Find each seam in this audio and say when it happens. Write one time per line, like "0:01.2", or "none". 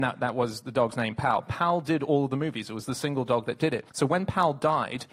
0:03.9